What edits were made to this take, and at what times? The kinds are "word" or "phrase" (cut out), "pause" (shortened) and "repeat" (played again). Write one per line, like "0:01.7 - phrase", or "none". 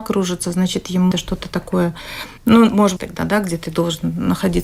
0:01.1 - word
0:02.4 - pause
0:03.0 - phrase